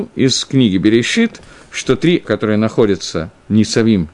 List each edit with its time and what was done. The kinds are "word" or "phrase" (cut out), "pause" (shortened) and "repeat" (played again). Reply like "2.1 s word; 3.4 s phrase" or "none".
2.2 s word